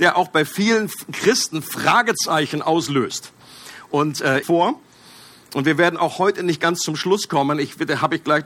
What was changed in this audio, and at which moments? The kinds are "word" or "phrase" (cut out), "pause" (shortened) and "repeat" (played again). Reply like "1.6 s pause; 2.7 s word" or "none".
4.4 s phrase

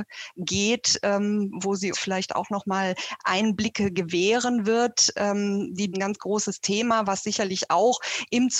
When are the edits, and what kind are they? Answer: 1.9 s word; 5.9 s phrase

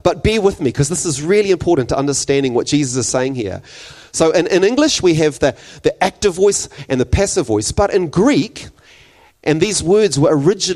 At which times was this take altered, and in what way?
none

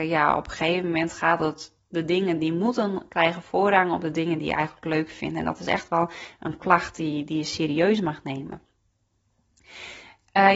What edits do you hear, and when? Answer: none

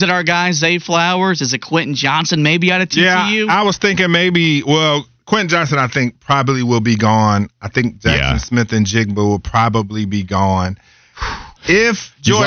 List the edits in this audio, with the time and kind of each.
11.6 s pause

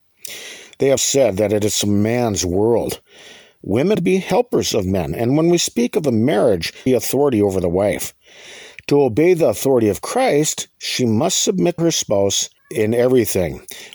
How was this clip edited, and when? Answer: 1.0 s word; 3.9 s phrase; 6.9 s phrase; 10.7 s pause; 11.8 s word; 12.6 s pause

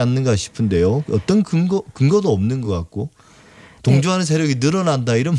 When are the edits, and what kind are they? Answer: none

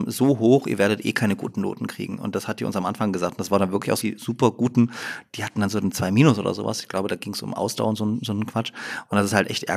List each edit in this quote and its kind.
4.0 s word

